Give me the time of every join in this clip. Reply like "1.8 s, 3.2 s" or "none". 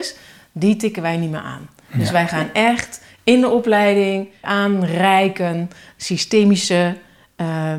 4.4 s